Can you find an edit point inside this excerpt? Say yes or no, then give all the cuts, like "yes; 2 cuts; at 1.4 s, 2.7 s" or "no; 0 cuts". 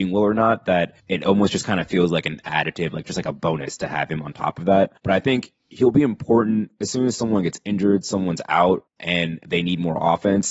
yes; 3 cuts; at 1.0 s, 5.0 s, 8.9 s